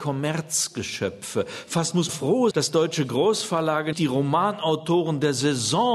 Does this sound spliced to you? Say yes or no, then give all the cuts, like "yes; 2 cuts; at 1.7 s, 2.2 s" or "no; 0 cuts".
yes; 3 cuts; at 2.1 s, 2.5 s, 3.9 s